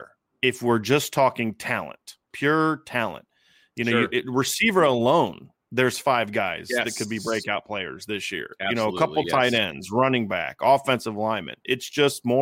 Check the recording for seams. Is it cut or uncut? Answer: cut